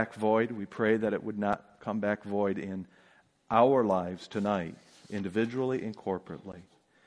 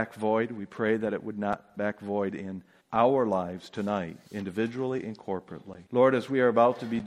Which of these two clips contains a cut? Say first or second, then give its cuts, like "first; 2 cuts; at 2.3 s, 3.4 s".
second; 4 cuts; at 1.8 s, 2.8 s, 4.3 s, 5.9 s